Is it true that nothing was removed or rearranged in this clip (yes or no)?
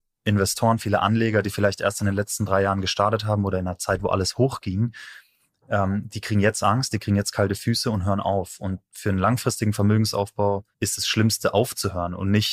no